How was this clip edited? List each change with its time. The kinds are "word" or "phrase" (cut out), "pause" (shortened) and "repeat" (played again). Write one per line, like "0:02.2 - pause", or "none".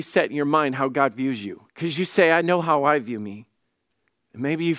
0:01.7 - pause